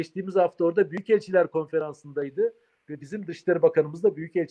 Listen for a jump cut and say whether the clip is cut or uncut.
uncut